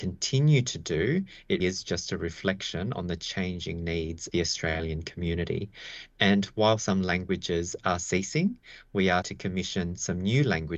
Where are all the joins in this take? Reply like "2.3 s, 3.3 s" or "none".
1.6 s, 4.3 s, 9.2 s